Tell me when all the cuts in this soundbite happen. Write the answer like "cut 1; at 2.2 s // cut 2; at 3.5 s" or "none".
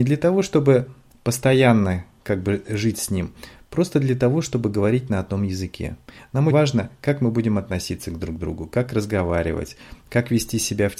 cut 1; at 6.5 s